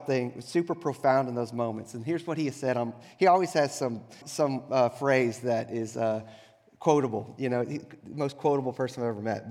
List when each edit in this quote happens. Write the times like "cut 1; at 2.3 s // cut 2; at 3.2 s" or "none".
cut 1; at 4.2 s